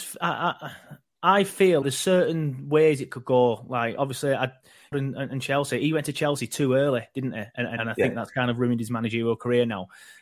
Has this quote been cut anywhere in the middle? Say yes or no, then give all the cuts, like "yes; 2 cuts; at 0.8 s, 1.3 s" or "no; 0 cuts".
yes; 3 cuts; at 1.8 s, 4.9 s, 7.8 s